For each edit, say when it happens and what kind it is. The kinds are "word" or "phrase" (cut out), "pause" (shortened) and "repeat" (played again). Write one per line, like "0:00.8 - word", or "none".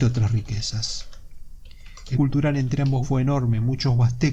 0:02.1 - word
0:03.0 - word